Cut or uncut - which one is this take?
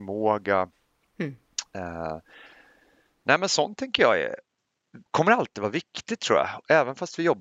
cut